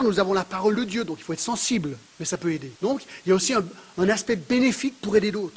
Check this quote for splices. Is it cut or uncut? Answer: cut